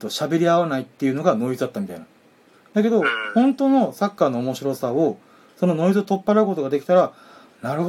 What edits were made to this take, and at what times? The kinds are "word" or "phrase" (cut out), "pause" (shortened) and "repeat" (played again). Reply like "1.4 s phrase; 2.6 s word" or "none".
none